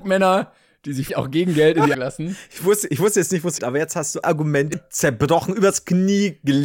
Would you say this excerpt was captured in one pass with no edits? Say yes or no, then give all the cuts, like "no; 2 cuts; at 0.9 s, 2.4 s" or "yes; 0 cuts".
no; 5 cuts; at 1.1 s, 1.9 s, 3.6 s, 4.2 s, 4.7 s